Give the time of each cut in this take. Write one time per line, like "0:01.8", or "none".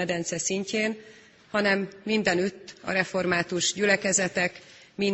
none